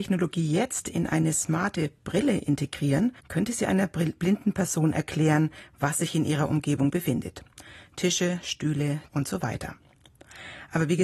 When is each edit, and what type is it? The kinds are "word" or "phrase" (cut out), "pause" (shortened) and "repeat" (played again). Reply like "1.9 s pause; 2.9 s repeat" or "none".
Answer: 3.2 s pause; 9.1 s word